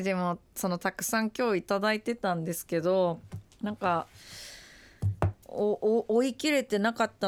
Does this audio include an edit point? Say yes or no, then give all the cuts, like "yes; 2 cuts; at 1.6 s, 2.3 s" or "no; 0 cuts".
yes; 1 cut; at 5.4 s